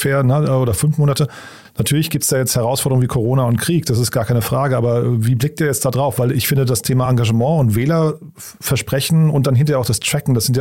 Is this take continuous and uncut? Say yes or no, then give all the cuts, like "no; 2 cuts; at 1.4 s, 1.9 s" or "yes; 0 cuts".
yes; 0 cuts